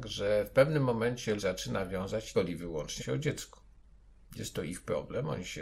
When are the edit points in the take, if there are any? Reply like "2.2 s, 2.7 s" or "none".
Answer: 1.4 s, 2.3 s, 3.0 s